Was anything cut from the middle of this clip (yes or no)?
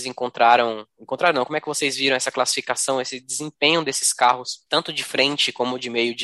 yes